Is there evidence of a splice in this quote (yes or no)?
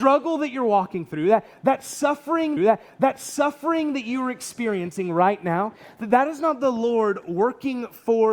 yes